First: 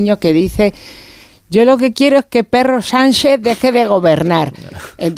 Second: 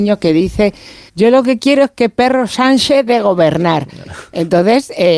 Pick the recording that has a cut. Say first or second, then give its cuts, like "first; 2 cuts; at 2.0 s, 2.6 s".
second; 2 cuts; at 1.1 s, 3.1 s